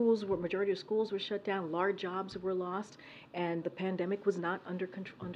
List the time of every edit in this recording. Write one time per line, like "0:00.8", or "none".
0:03.6